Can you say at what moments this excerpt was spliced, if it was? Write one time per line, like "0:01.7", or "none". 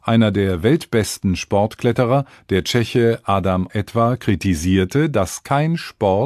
0:03.7